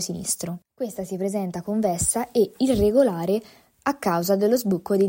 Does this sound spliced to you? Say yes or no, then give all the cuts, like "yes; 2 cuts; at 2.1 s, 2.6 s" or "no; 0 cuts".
no; 0 cuts